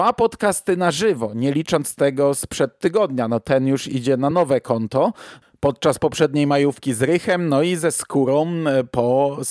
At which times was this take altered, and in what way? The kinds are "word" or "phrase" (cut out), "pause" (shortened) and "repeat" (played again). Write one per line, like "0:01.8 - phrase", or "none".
none